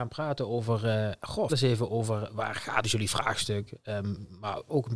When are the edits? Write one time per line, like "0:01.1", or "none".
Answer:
0:01.5
0:02.8